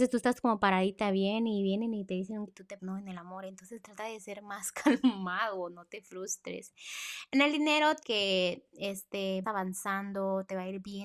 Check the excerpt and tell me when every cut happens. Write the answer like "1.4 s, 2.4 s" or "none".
2.5 s, 2.8 s, 8.0 s, 9.4 s